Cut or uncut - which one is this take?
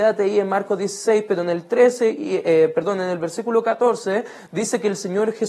uncut